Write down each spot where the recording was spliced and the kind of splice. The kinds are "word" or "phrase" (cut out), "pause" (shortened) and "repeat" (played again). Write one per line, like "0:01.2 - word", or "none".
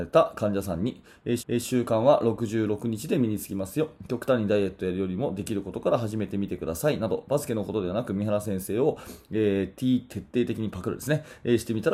0:01.4 - repeat
0:10.1 - word